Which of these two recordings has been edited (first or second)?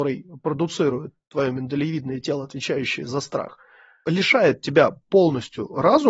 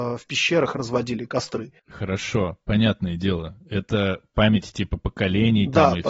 second